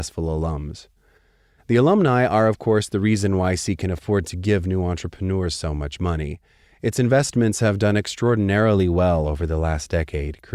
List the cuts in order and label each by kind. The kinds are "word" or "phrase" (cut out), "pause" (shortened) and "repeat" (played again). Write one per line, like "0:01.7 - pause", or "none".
none